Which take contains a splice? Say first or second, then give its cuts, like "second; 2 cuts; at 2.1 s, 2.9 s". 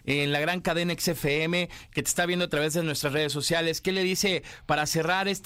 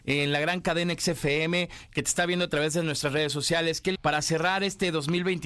second; 1 cut; at 3.9 s